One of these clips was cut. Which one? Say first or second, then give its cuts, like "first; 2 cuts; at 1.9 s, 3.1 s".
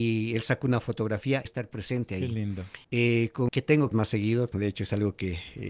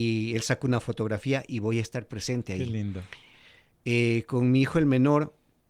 first; 5 cuts; at 1.5 s, 2.8 s, 3.5 s, 3.9 s, 4.5 s